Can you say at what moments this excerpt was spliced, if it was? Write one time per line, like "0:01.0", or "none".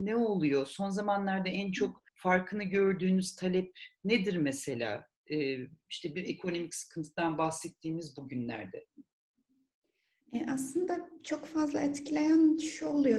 0:02.1